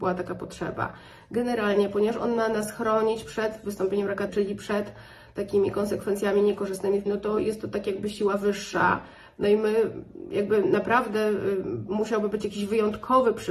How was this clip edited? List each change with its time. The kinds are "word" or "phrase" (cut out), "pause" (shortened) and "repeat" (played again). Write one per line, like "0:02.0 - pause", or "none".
0:04.3 - word
0:07.1 - word